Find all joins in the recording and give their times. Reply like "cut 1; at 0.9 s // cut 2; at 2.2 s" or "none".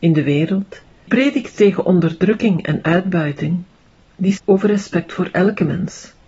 cut 1; at 1.1 s // cut 2; at 4.4 s